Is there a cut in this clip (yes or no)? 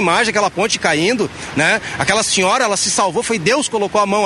no